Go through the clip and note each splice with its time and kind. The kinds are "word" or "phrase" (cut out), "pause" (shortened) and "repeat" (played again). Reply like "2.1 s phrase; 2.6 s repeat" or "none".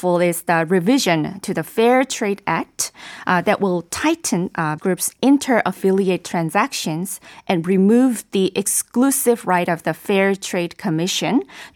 4.8 s word